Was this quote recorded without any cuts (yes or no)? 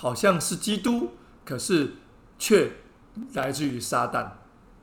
yes